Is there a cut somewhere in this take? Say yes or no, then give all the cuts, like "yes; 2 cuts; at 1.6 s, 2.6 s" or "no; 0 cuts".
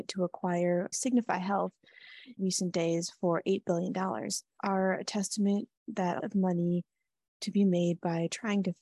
yes; 5 cuts; at 0.9 s, 2.4 s, 4.6 s, 5.8 s, 6.2 s